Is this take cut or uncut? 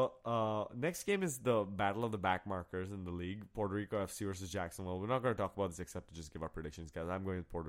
uncut